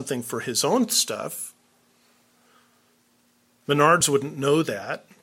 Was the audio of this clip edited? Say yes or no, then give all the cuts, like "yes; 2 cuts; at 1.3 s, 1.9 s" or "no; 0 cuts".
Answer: no; 0 cuts